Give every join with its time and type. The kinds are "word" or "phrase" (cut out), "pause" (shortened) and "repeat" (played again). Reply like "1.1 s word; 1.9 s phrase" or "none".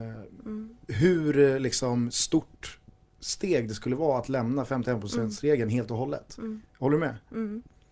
none